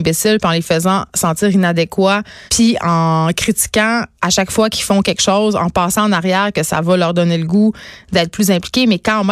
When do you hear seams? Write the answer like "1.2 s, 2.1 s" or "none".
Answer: 2.5 s, 4.1 s